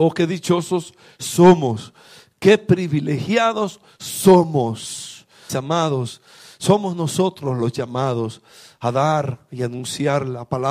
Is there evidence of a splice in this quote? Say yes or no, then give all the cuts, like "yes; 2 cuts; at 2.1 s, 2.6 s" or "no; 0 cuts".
yes; 1 cut; at 5.5 s